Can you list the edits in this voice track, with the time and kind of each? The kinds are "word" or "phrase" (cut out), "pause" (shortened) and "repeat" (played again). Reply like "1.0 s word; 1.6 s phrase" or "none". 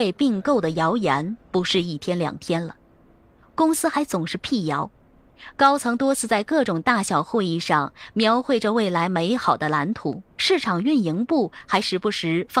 1.4 s pause; 10.3 s pause

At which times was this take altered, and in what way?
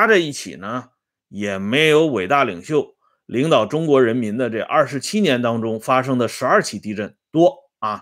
none

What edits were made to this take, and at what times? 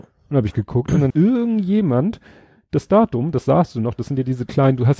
1.1 s word

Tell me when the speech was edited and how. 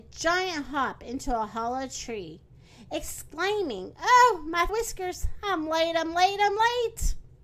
4.7 s phrase

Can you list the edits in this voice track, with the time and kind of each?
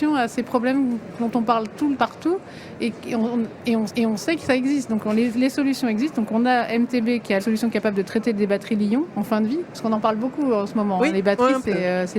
2.0 s word; 3.9 s repeat; 7.4 s phrase

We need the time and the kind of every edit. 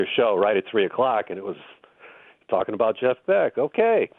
none

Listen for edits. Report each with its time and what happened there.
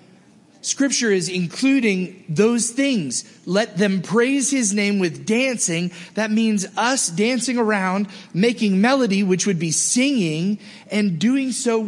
none

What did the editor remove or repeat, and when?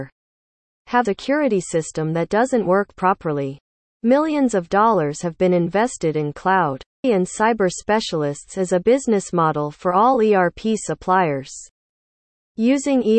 1.1 s word; 7.0 s word

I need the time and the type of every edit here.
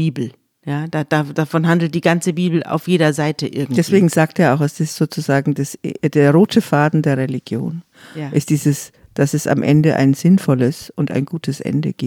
none

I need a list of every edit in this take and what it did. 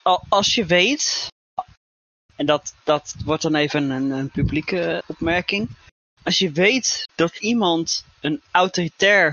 5.0 s word

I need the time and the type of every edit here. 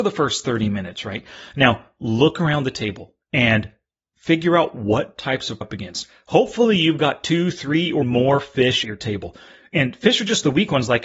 3.2 s pause; 5.6 s phrase; 8.0 s word; 8.8 s word

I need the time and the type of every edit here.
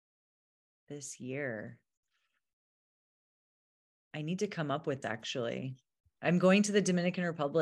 5.0 s word

